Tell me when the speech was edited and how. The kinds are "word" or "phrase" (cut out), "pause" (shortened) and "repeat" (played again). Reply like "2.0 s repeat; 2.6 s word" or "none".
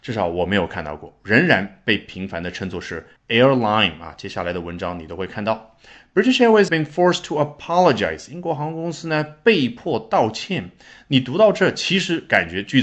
3.2 s pause; 6.7 s word